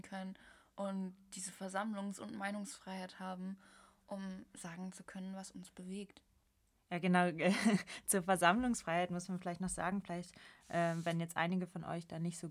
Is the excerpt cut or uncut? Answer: uncut